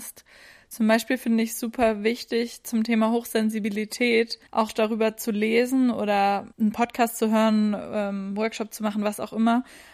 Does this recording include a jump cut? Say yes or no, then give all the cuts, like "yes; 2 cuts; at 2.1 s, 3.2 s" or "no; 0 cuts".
yes; 2 cuts; at 4.5 s, 6.5 s